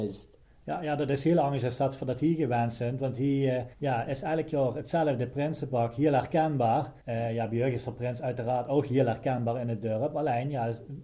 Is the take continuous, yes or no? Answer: no